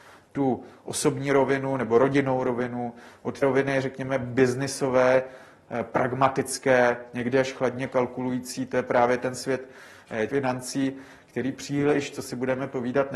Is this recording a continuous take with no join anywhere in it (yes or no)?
no